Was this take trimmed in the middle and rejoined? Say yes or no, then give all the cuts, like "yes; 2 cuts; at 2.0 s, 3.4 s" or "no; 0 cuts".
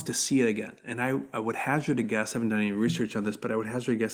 no; 0 cuts